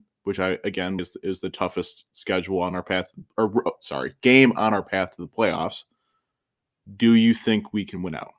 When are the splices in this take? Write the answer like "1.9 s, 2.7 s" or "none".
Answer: 1.0 s